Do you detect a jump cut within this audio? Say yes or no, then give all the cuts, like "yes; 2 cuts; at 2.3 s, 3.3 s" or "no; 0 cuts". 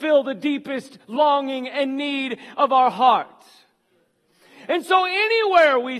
no; 0 cuts